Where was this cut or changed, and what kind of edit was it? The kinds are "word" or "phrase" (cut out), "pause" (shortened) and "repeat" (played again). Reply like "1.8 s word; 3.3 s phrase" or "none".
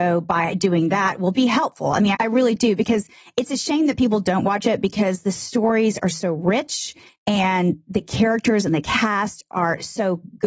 2.1 s word